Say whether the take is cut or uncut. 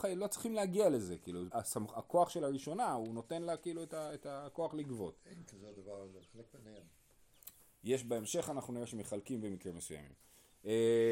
cut